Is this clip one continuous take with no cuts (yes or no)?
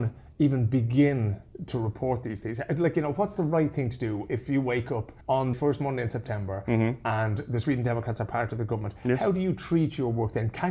no